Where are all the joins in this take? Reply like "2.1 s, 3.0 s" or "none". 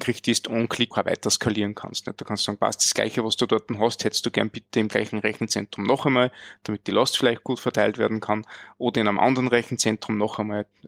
0.9 s